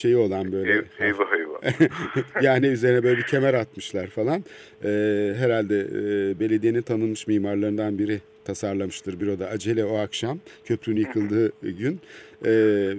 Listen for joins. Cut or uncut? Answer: uncut